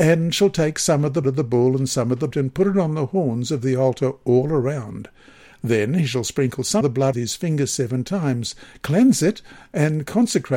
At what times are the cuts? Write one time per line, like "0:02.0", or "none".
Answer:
0:01.2
0:02.3
0:06.8
0:07.1